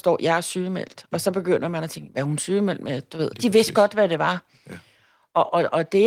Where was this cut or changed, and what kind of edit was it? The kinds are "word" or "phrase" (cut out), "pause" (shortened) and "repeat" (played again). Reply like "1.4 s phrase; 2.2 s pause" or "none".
3.3 s word